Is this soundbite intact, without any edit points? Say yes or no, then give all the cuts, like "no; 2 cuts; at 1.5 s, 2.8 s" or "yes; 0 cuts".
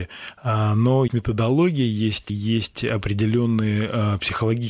no; 2 cuts; at 1.1 s, 2.3 s